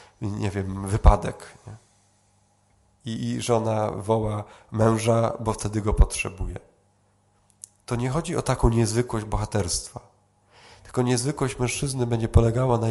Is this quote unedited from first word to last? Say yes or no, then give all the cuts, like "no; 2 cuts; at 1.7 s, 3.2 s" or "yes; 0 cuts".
no; 1 cut; at 3.2 s